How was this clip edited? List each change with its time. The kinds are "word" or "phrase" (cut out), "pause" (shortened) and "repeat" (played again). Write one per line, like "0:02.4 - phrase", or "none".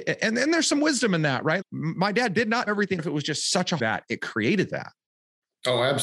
0:01.6 - word
0:02.7 - word
0:03.0 - phrase
0:03.8 - phrase